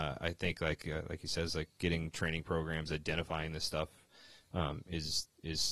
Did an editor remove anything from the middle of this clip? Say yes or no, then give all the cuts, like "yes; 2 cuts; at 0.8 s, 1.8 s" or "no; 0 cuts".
no; 0 cuts